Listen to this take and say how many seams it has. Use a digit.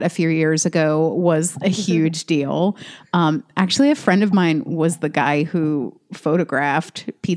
0